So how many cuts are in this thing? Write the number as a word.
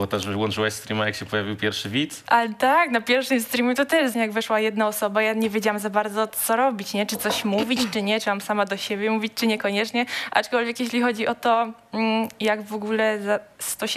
one